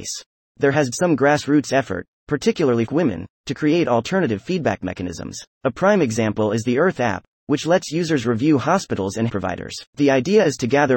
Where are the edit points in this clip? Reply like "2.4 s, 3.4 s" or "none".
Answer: 0.9 s, 2.9 s, 5.5 s, 9.3 s, 9.9 s